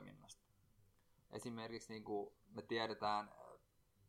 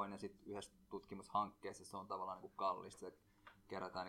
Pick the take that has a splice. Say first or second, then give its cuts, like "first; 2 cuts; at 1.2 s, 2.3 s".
first; 1 cut; at 2.4 s